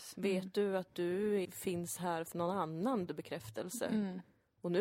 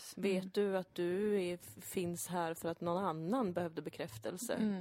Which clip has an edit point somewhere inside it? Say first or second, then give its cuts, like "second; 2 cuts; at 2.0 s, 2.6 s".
first; 3 cuts; at 1.4 s, 2.3 s, 3.1 s